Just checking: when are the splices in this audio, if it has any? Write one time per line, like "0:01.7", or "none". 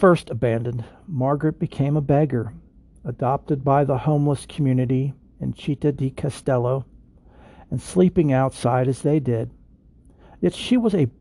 none